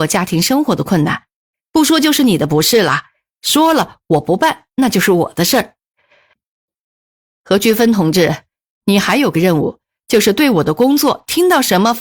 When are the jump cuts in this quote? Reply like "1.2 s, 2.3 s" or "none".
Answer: none